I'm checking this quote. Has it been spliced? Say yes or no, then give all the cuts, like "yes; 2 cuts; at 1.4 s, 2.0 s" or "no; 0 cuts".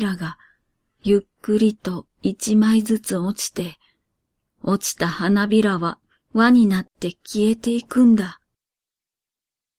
no; 0 cuts